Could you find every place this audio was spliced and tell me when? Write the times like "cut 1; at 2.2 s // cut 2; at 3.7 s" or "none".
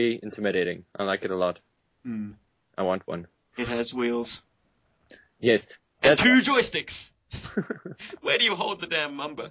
none

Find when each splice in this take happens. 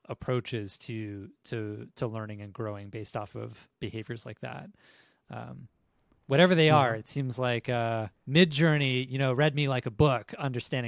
cut 1; at 3.7 s // cut 2; at 8.2 s

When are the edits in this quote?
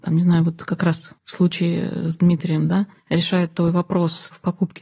cut 1; at 1.2 s // cut 2; at 3.0 s

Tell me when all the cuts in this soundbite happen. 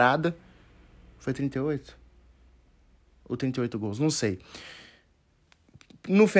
none

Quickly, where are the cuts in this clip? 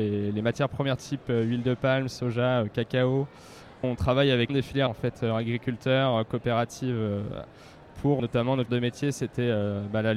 cut 1; at 1.0 s // cut 2; at 3.8 s // cut 3; at 4.5 s // cut 4; at 4.9 s // cut 5; at 7.5 s // cut 6; at 8.2 s // cut 7; at 8.7 s

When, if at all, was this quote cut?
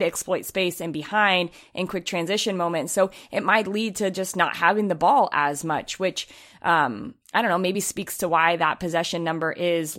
none

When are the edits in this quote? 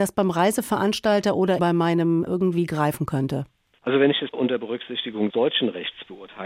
cut 1; at 1.6 s // cut 2; at 2.3 s // cut 3; at 4.3 s // cut 4; at 5.3 s

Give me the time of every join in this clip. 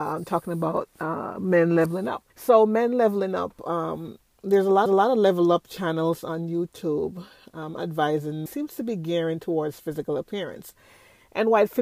cut 1; at 2.3 s // cut 2; at 4.9 s // cut 3; at 8.5 s

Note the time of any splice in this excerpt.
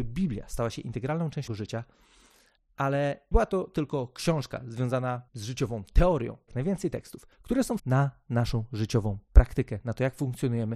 cut 1; at 1.5 s // cut 2; at 3.3 s // cut 3; at 5.3 s // cut 4; at 6.5 s // cut 5; at 7.3 s // cut 6; at 7.8 s

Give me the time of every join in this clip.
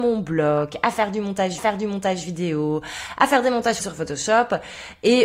cut 1; at 1.6 s // cut 2; at 3.8 s

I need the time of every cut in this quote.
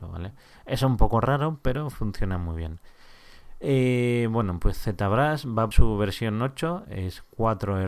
cut 1; at 5.7 s

